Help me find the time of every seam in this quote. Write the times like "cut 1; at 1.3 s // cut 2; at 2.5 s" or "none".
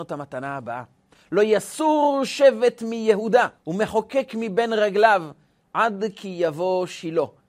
cut 1; at 3.6 s